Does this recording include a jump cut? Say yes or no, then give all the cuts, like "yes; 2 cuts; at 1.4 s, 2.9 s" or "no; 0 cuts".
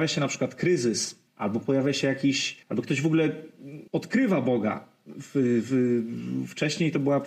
yes; 3 cuts; at 1.3 s, 2.6 s, 3.9 s